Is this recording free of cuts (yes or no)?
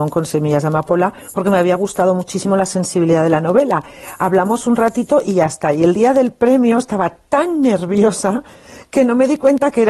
yes